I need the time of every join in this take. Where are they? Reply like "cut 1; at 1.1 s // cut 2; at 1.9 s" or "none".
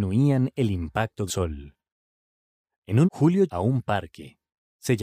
cut 1; at 1.3 s // cut 2; at 3.0 s // cut 3; at 3.5 s